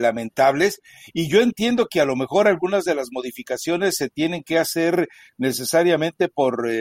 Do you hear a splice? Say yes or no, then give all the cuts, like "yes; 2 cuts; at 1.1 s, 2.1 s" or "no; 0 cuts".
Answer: no; 0 cuts